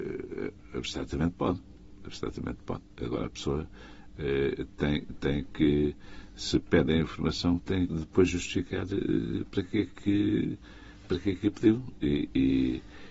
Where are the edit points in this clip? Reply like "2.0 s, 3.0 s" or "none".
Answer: 7.9 s